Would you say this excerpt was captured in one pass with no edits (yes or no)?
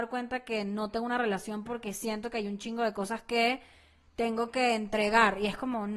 yes